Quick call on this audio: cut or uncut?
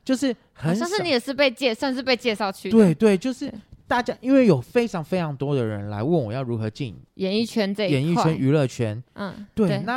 cut